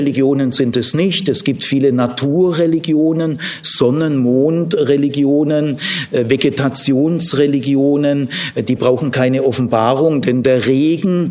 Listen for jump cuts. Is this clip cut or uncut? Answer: uncut